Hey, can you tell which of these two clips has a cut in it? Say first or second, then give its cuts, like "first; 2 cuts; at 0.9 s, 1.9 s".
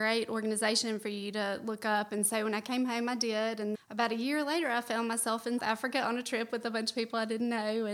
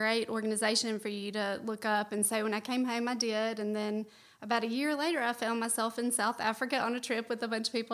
first; 2 cuts; at 3.7 s, 5.6 s